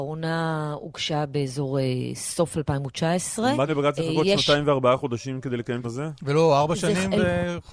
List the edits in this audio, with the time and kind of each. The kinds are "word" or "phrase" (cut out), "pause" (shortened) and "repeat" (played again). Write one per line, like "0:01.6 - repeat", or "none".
0:03.7 - word
0:05.8 - word